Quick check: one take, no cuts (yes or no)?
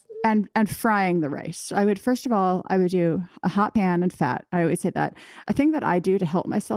yes